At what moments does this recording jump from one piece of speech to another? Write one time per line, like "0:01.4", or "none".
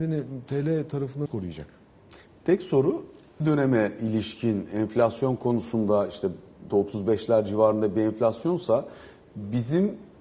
0:01.3
0:03.4
0:06.7